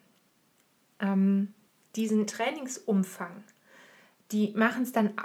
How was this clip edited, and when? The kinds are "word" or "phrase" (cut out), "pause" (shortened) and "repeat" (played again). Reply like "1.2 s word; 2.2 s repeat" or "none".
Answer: 2.3 s word

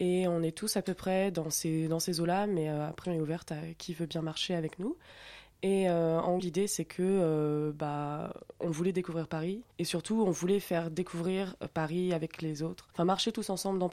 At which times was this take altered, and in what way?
3.0 s word; 6.4 s word; 9.7 s pause; 12.9 s pause

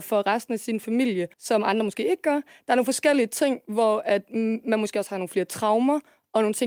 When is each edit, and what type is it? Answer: 1.3 s pause

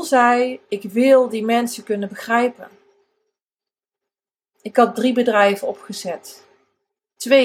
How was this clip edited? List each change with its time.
none

